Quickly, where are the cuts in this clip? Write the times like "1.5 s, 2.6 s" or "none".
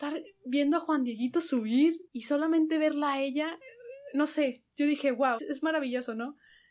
2.1 s, 4.7 s, 5.4 s